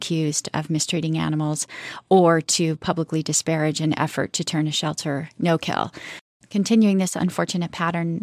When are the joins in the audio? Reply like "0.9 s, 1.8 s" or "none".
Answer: none